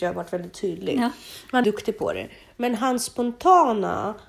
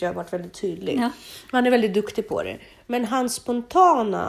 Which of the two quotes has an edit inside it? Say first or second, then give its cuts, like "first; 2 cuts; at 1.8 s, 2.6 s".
first; 1 cut; at 1.6 s